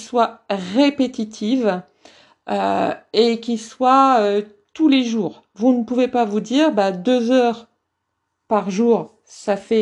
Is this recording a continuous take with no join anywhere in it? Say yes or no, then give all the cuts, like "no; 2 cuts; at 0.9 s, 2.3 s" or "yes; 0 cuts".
yes; 0 cuts